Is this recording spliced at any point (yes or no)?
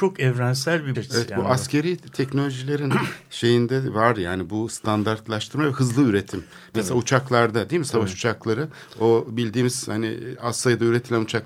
yes